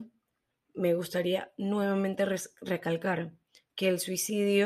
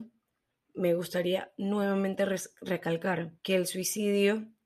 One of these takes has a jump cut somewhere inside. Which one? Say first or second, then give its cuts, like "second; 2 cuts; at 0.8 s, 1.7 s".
second; 1 cut; at 3.4 s